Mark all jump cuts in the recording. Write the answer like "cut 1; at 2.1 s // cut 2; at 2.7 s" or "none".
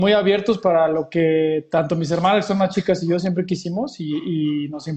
none

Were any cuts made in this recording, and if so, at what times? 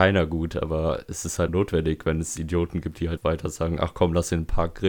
cut 1; at 1.5 s // cut 2; at 3.2 s

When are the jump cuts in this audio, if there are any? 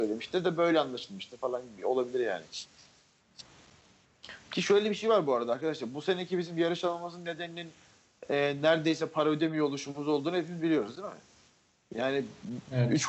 none

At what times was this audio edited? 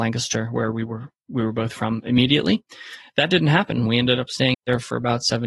cut 1; at 4.5 s

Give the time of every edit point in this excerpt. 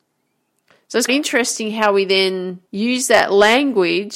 cut 1; at 1.1 s // cut 2; at 2.7 s

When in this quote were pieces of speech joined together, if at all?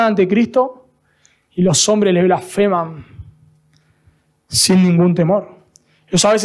none

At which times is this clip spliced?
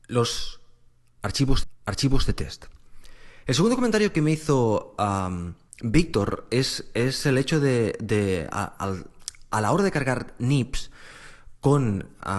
cut 1; at 1.6 s // cut 2; at 5.7 s

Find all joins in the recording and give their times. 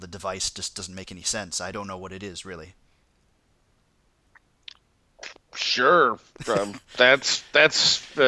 cut 1; at 1.7 s

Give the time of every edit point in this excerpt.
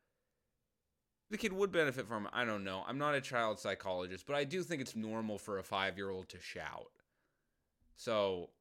cut 1; at 1.3 s // cut 2; at 4.9 s

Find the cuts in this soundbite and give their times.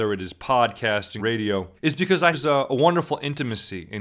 cut 1; at 1.2 s // cut 2; at 1.8 s // cut 3; at 2.3 s

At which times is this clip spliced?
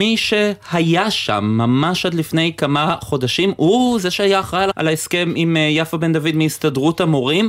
cut 1; at 4.7 s

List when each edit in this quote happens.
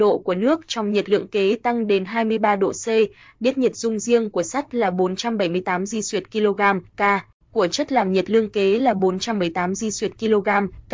none

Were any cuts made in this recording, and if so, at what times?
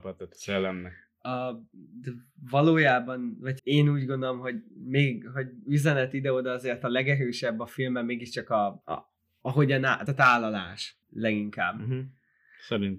cut 1; at 3.6 s // cut 2; at 8.8 s // cut 3; at 10.1 s // cut 4; at 11.0 s

